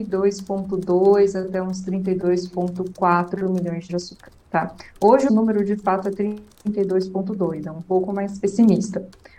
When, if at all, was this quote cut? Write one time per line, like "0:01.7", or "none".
0:03.9
0:05.3